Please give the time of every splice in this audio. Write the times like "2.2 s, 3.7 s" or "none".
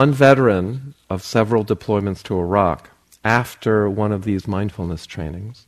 3.0 s